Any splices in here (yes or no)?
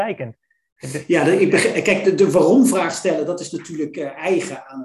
no